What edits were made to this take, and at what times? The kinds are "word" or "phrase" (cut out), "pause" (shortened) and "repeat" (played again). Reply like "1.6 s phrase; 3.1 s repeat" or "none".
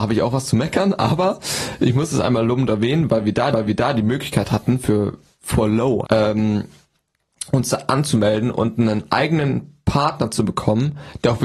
3.5 s repeat; 6.0 s word